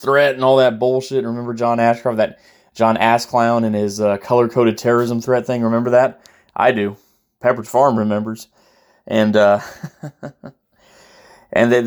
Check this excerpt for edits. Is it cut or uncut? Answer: uncut